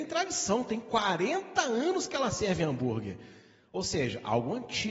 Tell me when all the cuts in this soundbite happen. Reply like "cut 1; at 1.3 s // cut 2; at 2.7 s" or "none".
none

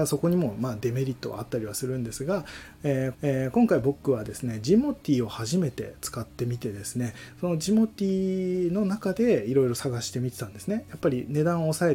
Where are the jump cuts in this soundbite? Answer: cut 1; at 3.1 s

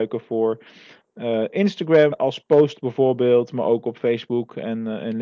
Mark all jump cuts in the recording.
cut 1; at 2.1 s

